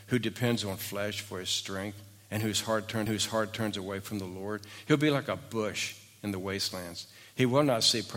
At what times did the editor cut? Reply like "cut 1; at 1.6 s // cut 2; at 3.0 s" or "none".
cut 1; at 3.1 s

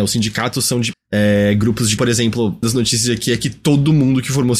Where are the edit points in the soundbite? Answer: cut 1; at 0.9 s // cut 2; at 2.0 s // cut 3; at 2.6 s

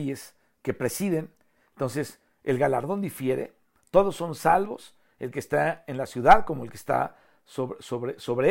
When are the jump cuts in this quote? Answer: none

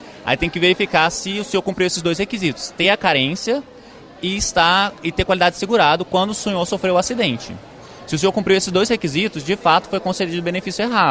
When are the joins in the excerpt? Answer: none

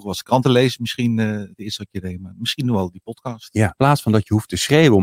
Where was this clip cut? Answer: cut 1; at 3.8 s

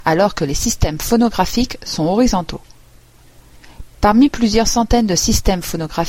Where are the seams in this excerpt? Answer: none

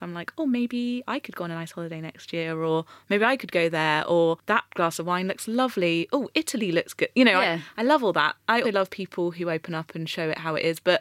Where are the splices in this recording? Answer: cut 1; at 8.6 s

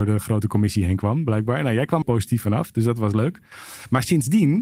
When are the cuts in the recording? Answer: cut 1; at 2.0 s

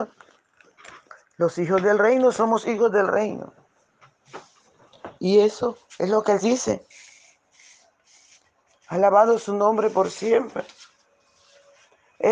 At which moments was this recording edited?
cut 1; at 5.2 s // cut 2; at 6.4 s

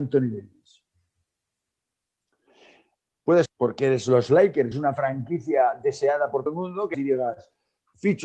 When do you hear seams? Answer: cut 1; at 3.5 s // cut 2; at 4.7 s // cut 3; at 6.5 s // cut 4; at 6.9 s

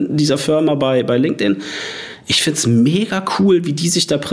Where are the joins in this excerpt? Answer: none

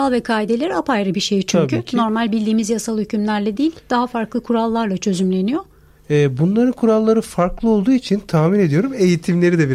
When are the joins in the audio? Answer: none

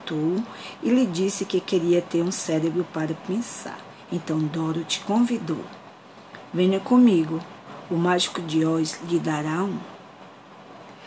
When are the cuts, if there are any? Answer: cut 1; at 3.2 s

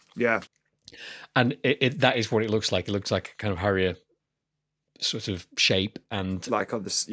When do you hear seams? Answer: none

